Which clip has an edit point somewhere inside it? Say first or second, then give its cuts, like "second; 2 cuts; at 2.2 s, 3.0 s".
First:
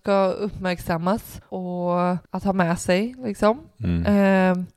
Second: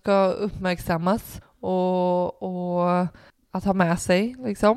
first; 2 cuts; at 1.5 s, 2.2 s